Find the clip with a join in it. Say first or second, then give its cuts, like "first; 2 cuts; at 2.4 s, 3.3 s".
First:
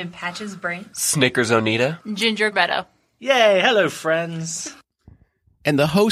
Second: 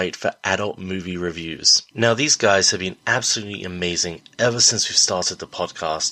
first; 1 cut; at 2.5 s